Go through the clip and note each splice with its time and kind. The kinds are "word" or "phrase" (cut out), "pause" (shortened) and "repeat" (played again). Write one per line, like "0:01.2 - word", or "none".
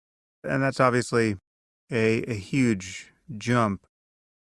none